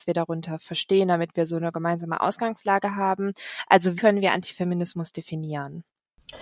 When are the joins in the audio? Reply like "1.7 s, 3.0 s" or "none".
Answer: 4.0 s